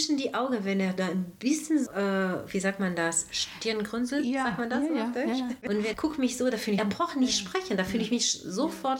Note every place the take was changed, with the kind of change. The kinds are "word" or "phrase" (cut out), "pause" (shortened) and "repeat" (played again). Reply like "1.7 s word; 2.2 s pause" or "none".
1.9 s word; 5.9 s word; 6.8 s phrase